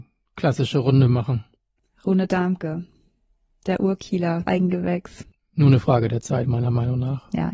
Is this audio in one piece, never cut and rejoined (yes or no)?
no